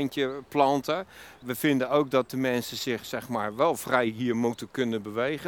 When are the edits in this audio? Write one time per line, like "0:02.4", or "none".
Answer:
none